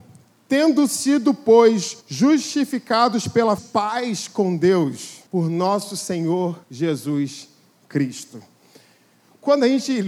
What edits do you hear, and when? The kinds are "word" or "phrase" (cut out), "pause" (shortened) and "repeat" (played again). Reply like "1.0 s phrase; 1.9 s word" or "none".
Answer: 2.0 s pause; 3.6 s phrase; 5.3 s pause; 6.6 s pause